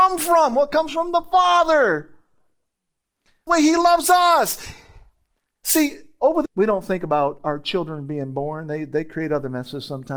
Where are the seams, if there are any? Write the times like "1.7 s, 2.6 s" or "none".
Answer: 3.5 s, 6.4 s